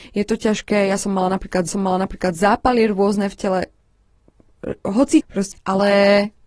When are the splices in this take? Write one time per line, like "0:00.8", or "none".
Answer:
0:01.7
0:05.2
0:05.5